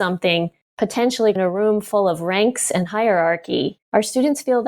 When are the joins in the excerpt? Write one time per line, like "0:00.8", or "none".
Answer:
0:01.4